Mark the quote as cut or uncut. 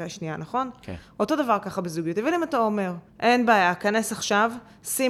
cut